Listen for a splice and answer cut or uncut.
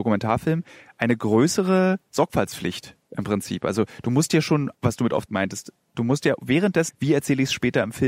cut